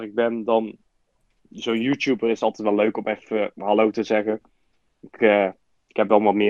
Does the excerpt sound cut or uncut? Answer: uncut